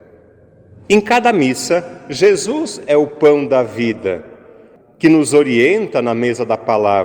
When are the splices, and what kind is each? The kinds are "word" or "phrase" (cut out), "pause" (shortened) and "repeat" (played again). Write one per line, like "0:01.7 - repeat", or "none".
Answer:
none